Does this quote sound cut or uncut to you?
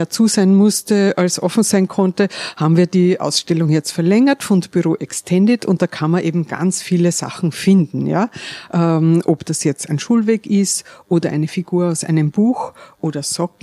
uncut